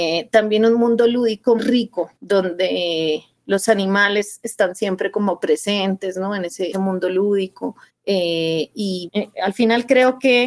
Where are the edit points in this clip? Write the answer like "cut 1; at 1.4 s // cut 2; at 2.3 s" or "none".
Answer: cut 1; at 1.6 s // cut 2; at 2.2 s // cut 3; at 6.7 s // cut 4; at 7.9 s // cut 5; at 9.1 s